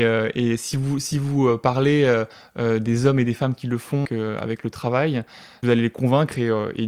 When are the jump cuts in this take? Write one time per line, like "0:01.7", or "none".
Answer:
0:04.1
0:05.6